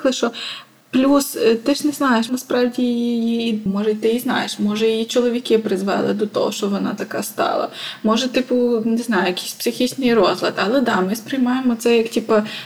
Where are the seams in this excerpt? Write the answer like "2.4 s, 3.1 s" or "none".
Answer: 2.3 s, 3.7 s